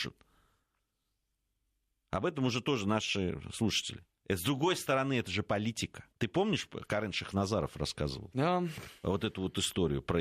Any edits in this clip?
yes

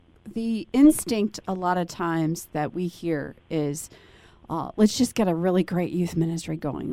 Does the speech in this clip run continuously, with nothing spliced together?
yes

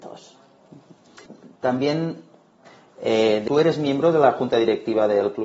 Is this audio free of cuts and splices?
no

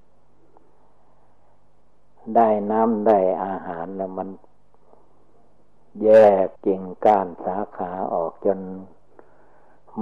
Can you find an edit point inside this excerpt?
yes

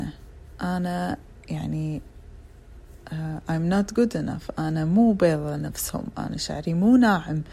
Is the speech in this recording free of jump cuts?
yes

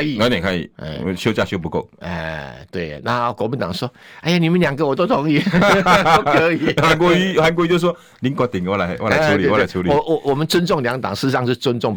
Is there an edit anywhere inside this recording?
no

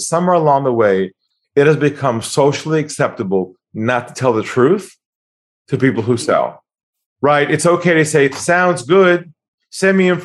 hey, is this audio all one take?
yes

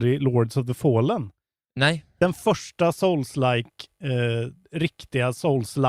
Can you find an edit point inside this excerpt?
no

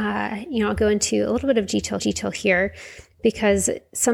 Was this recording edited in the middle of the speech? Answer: yes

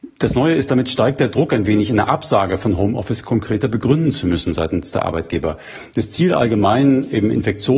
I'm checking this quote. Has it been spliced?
no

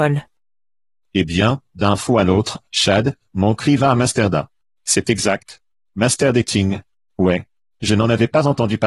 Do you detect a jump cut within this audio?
no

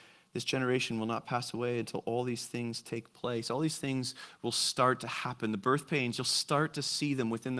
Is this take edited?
no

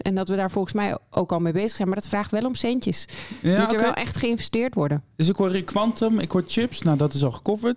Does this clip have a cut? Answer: no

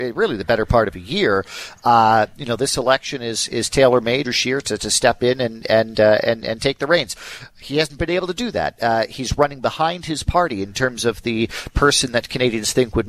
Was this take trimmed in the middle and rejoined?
yes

